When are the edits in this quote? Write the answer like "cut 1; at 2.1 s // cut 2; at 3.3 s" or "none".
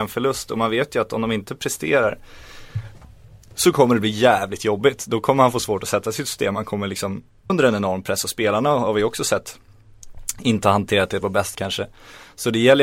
cut 1; at 7.5 s // cut 2; at 11.5 s